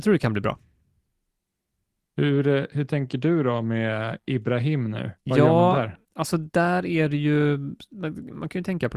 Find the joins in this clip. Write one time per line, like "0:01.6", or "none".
0:05.2
0:06.0